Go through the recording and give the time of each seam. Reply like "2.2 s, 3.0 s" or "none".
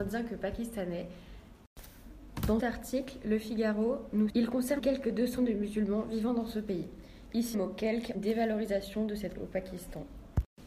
2.6 s, 4.3 s, 4.8 s, 5.4 s, 7.5 s, 8.1 s, 9.3 s